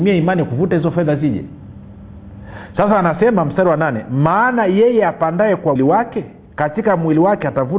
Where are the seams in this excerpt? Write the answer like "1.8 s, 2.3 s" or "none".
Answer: 5.8 s